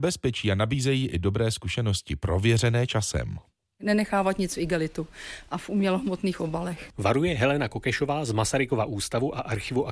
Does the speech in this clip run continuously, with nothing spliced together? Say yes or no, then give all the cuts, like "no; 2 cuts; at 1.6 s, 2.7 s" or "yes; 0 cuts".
yes; 0 cuts